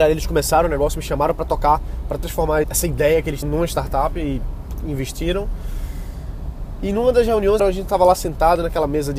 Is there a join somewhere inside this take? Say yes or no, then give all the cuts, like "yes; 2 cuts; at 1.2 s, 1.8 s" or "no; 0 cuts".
yes; 3 cuts; at 2.6 s, 3.4 s, 7.6 s